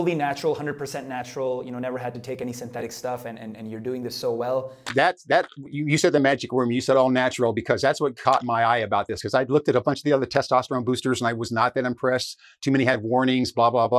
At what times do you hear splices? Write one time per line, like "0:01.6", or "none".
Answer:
none